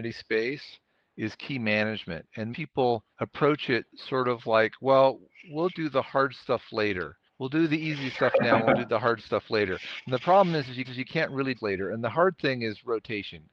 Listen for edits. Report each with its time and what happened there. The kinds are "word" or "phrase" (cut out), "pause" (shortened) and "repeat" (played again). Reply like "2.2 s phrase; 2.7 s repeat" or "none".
2.5 s word; 3.1 s pause; 5.7 s word; 7.3 s pause; 10.8 s repeat; 11.5 s phrase